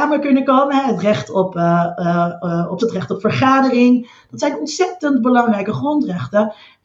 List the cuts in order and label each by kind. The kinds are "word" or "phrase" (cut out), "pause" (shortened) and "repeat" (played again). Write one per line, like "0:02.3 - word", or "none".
0:02.8 - word